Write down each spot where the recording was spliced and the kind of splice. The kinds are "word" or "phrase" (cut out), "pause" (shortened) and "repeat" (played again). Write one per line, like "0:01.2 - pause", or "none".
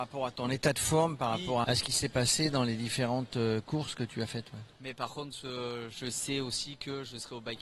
0:01.6 - word

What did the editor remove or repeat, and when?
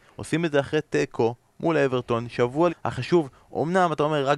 0:02.7 - phrase

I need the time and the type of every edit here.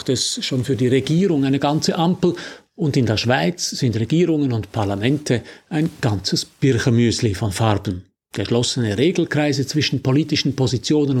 none

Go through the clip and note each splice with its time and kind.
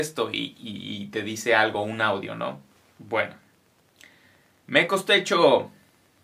none

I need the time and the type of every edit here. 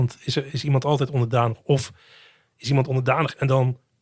none

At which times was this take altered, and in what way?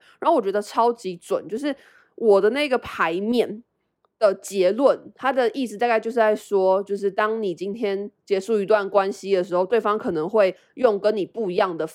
none

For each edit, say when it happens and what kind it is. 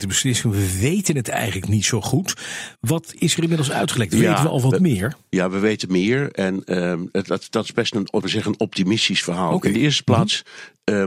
0:02.8 - pause
0:08.2 - phrase

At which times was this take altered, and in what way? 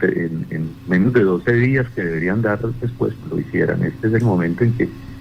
0:03.2 - word

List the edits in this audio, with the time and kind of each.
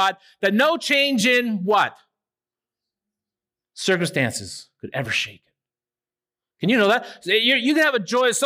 none

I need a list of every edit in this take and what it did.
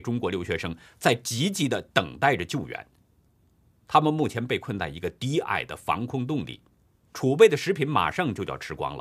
none

